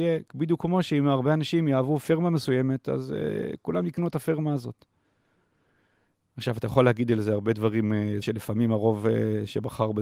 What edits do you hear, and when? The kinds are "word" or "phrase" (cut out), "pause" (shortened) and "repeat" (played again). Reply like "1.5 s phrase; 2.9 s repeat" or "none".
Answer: 8.2 s word